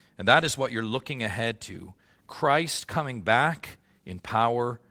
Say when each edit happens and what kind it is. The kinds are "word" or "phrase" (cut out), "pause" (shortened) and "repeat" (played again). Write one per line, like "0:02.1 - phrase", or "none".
none